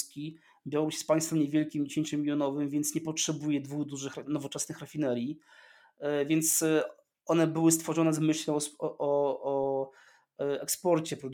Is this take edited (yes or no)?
no